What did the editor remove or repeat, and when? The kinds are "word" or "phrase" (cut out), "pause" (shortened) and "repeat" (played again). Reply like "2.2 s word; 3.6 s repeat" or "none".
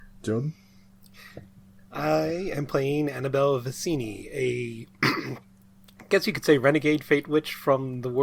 none

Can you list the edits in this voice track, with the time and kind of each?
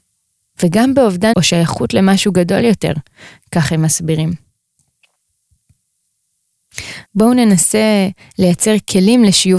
1.3 s phrase; 7.1 s pause

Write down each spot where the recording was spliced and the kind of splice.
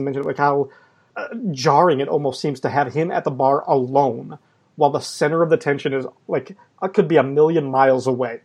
none

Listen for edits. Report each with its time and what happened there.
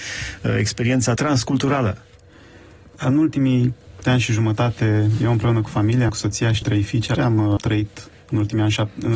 1.2 s word; 4.0 s word; 6.1 s word; 6.6 s word; 7.1 s word; 7.6 s word

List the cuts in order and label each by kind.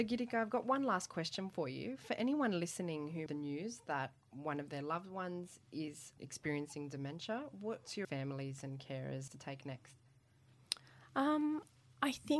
3.3 s phrase; 6.2 s word; 8.0 s phrase; 9.3 s phrase

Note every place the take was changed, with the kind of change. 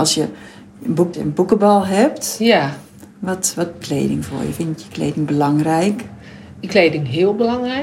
1.1 s phrase; 3.1 s pause; 3.8 s word; 6.7 s word

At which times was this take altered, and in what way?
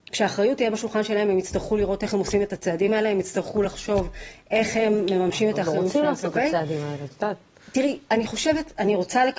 none

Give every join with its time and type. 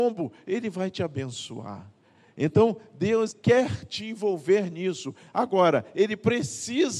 2.0 s pause; 3.3 s word

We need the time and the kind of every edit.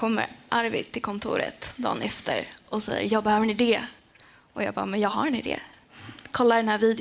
none

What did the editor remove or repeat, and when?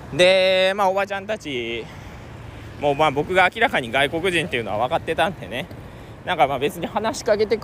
none

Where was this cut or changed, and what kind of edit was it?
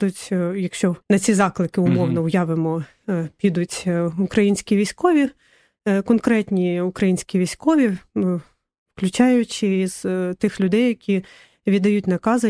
1.0 s pause

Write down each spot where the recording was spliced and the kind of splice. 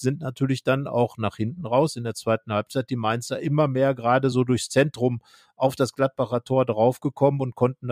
none

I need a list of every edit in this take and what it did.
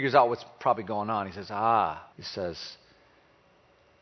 2.1 s pause

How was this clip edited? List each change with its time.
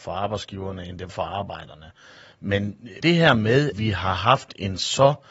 1.1 s word; 3.0 s word; 3.7 s word

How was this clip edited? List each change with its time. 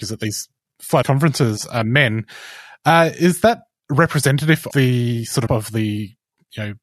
1.0 s word; 4.7 s word; 5.5 s word

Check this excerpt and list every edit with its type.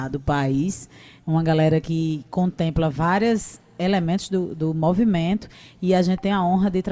none

